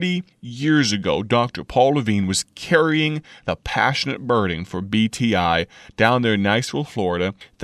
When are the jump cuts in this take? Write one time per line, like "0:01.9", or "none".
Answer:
none

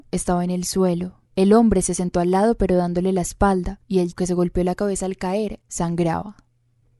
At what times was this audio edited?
0:01.3
0:03.8
0:04.1

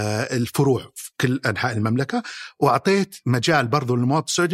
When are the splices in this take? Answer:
none

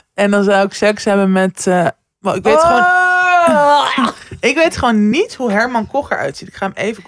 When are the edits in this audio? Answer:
none

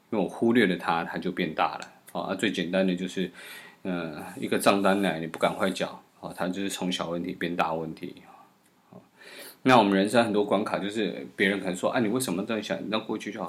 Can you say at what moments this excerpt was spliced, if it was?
0:06.1

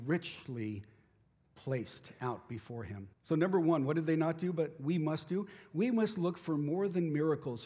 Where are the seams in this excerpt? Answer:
0:03.1

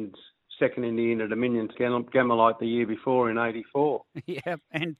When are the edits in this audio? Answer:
0:01.7

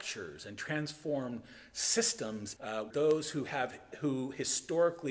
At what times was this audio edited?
0:02.6
0:02.9
0:03.9

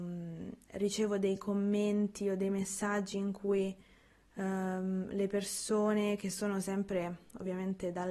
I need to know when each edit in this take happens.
none

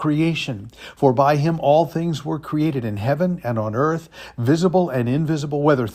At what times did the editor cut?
none

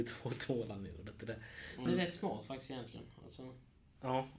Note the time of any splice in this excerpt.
0:01.9

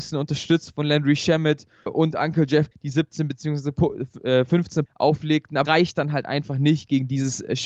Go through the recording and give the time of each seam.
0:01.9
0:02.7
0:04.9
0:05.6

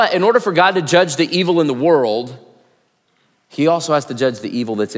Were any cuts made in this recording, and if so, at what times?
none

